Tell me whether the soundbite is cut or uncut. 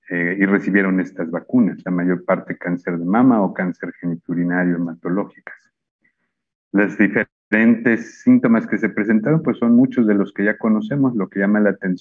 uncut